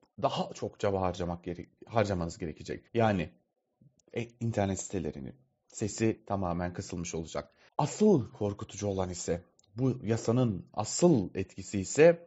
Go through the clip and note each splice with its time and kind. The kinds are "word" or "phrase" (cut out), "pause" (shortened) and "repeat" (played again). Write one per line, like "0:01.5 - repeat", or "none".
0:02.9 - pause
0:07.7 - pause

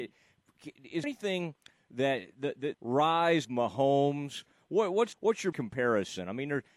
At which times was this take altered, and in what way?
0:01.0 - word
0:02.7 - word
0:03.4 - word
0:05.1 - word
0:05.5 - word

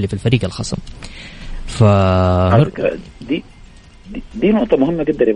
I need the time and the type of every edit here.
0:03.2 - word

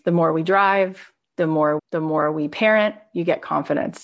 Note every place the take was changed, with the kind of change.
0:01.8 - phrase

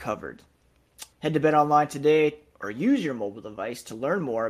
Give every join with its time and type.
0:01.1 - pause

